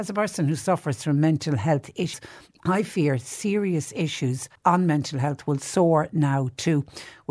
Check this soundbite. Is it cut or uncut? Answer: cut